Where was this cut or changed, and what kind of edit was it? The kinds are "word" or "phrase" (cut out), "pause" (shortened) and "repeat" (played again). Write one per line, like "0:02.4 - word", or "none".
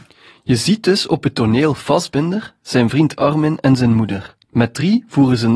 0:04.4 - pause